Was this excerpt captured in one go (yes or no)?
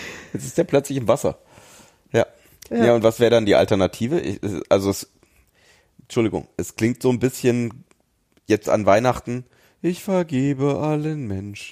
yes